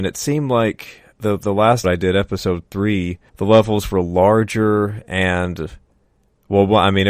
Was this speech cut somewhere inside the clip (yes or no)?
yes